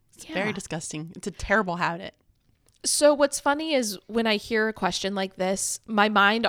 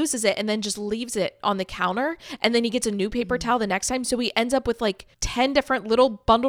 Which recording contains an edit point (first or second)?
second